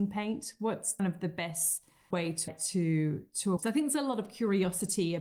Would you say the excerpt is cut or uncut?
cut